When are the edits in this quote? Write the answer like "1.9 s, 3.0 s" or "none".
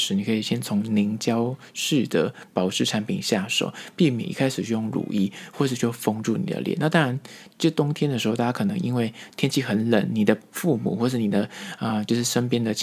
none